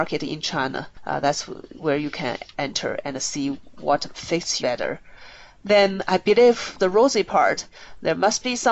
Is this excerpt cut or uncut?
cut